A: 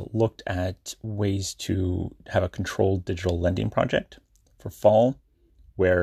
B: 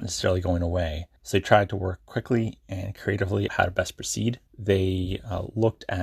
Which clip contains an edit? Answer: B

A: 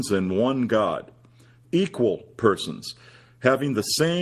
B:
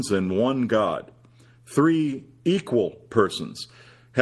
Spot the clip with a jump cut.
A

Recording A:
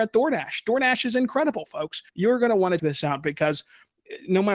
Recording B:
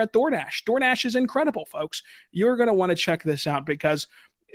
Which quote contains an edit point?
A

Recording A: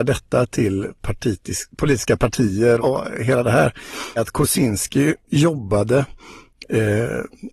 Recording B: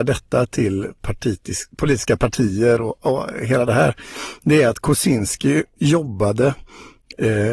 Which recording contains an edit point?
A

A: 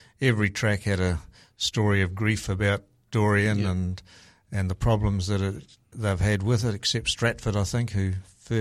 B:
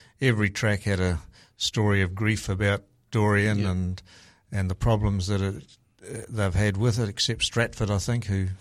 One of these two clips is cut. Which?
A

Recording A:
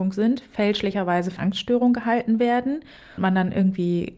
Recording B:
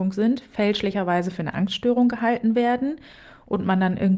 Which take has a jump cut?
A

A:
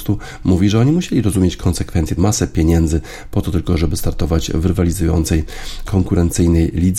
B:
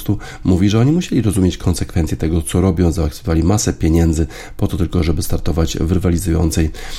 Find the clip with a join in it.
A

